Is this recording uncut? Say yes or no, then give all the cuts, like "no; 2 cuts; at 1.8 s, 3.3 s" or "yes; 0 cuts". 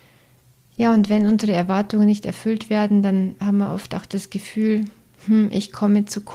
yes; 0 cuts